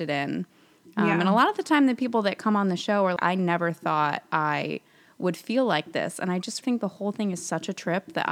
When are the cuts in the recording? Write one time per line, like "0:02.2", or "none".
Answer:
0:03.2
0:06.6